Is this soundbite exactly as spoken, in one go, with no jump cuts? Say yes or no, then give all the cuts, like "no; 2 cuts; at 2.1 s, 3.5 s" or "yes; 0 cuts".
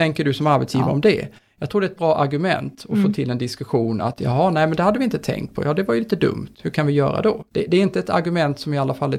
yes; 0 cuts